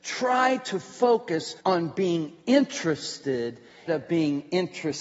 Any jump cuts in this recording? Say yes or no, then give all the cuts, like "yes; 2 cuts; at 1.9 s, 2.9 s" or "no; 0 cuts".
yes; 2 cuts; at 1.6 s, 3.9 s